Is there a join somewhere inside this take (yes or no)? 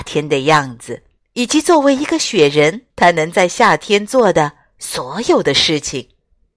yes